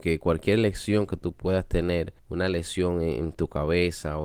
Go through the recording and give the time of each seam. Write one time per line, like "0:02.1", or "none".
0:02.2